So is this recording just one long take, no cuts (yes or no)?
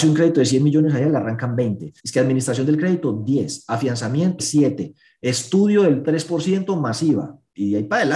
no